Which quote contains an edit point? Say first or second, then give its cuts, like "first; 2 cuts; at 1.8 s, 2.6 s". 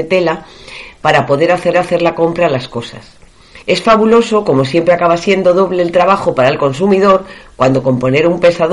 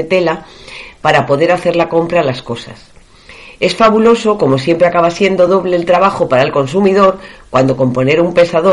first; 2 cuts; at 1.7 s, 3.6 s